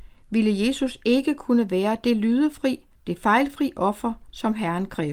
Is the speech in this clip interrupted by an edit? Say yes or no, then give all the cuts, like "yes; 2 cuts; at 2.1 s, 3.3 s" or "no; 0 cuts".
yes; 1 cut; at 3.0 s